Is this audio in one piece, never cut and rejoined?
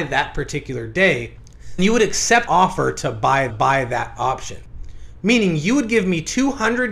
no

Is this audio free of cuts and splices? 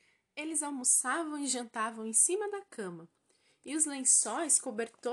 yes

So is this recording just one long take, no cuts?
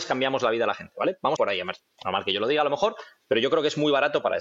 no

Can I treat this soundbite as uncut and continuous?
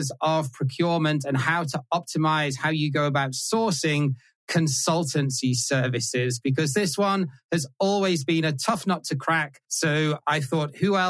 no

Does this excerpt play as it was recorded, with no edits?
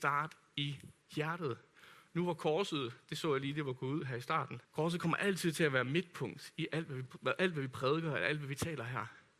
no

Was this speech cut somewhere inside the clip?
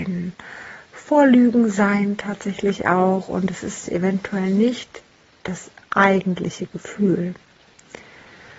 no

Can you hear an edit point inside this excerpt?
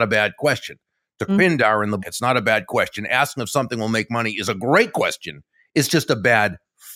yes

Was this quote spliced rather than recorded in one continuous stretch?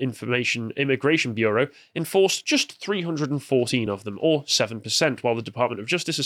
no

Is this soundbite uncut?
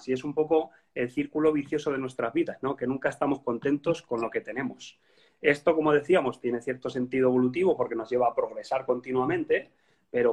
yes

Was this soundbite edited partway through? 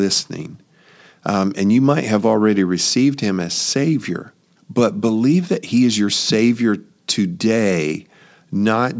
yes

